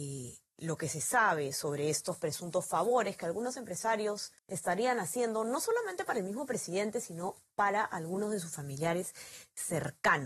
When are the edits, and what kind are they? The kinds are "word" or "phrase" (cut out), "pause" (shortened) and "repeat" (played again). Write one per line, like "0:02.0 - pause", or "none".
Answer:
0:04.4 - pause